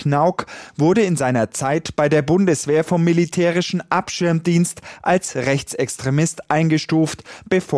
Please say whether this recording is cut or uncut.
uncut